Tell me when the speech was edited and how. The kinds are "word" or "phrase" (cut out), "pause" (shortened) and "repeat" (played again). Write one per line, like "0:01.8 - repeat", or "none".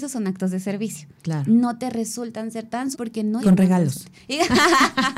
0:01.2 - pause
0:02.9 - word
0:03.4 - phrase